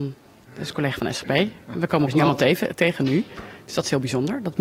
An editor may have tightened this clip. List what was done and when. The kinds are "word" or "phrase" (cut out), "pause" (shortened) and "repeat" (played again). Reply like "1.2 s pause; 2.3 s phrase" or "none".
2.1 s word